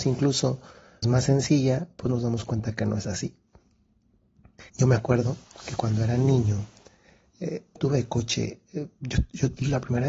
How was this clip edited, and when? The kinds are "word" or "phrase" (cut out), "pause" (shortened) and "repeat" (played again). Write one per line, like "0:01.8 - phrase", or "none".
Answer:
0:01.0 - word
0:04.7 - pause
0:07.8 - phrase